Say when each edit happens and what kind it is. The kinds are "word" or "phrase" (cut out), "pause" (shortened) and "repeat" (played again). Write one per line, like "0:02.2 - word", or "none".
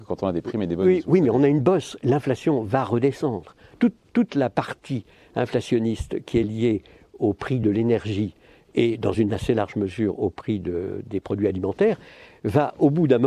none